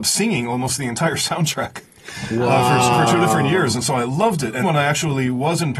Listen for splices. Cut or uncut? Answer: cut